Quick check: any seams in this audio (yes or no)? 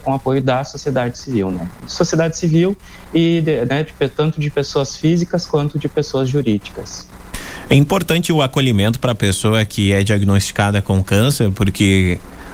no